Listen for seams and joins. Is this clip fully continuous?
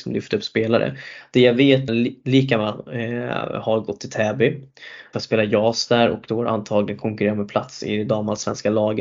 no; 2 cuts; at 1.9 s, 5.1 s

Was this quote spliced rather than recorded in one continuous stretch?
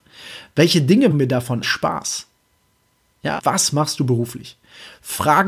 yes; 3 cuts; at 1.1 s, 1.6 s, 3.4 s

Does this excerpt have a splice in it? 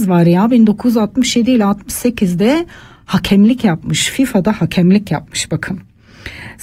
no; 0 cuts

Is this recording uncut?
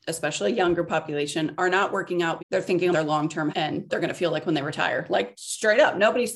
no; 4 cuts; at 2.4 s, 2.9 s, 3.5 s, 3.9 s

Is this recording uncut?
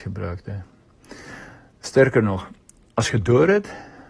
yes; 0 cuts

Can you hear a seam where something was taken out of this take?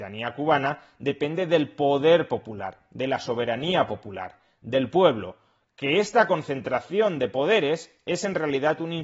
no; 0 cuts

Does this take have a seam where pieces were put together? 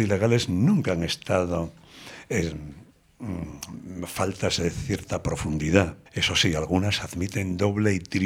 yes; 1 cut; at 6.1 s

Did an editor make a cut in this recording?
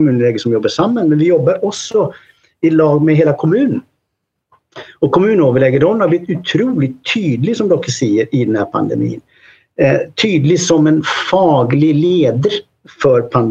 no; 0 cuts

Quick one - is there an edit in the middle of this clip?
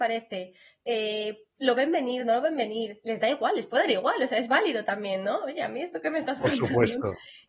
no; 0 cuts

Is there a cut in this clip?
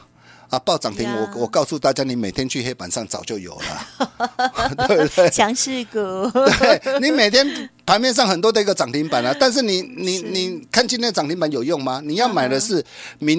no; 0 cuts

